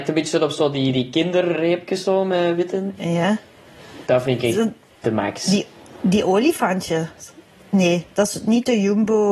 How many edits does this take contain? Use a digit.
0